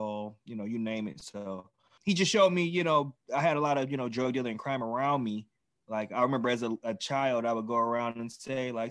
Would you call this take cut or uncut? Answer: uncut